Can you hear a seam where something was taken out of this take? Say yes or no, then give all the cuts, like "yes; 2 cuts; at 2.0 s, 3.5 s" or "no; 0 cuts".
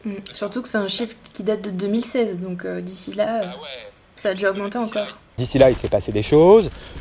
no; 0 cuts